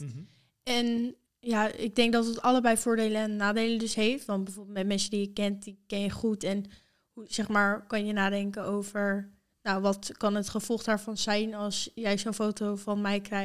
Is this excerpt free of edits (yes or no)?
yes